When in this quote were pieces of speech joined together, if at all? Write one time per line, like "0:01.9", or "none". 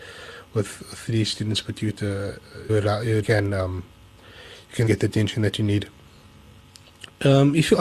0:02.7
0:03.2
0:04.9